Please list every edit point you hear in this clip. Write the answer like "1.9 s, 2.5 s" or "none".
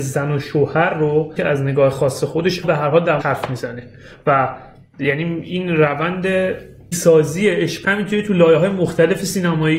1.4 s, 2.6 s, 3.2 s, 6.9 s, 7.8 s